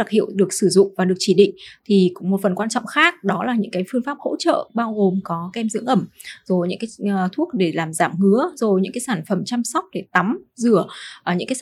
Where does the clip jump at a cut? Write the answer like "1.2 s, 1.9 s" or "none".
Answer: none